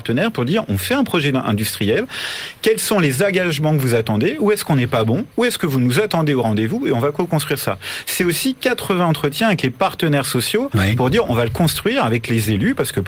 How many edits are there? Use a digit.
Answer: 1